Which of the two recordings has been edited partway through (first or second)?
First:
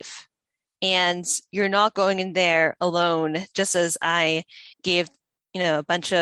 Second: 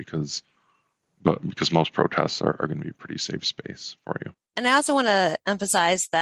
first